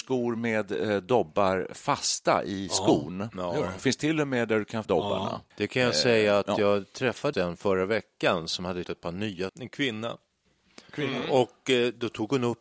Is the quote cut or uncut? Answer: cut